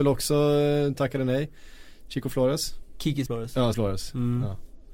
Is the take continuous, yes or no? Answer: no